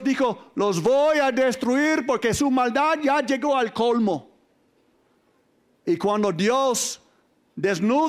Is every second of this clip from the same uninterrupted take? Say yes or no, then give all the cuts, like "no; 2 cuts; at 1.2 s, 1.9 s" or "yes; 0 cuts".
yes; 0 cuts